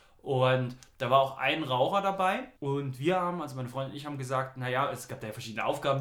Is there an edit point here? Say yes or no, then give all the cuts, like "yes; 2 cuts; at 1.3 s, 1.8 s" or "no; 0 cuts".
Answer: yes; 1 cut; at 2.6 s